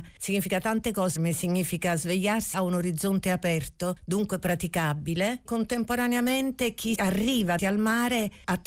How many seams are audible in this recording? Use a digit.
5